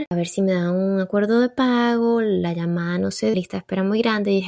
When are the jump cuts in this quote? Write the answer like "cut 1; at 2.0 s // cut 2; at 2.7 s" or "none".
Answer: cut 1; at 3.3 s